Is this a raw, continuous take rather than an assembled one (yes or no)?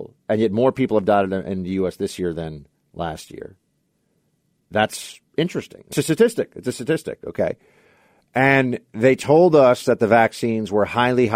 no